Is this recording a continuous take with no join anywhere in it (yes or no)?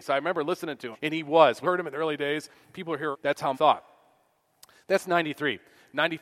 no